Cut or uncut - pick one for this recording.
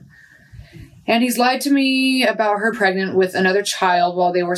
cut